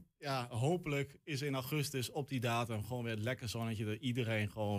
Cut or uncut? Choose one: uncut